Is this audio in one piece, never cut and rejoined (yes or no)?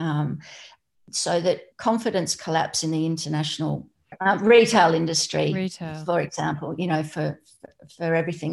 no